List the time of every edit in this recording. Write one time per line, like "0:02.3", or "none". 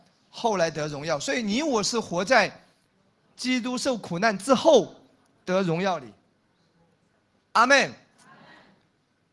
none